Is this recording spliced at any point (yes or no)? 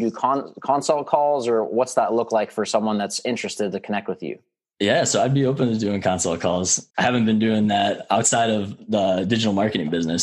yes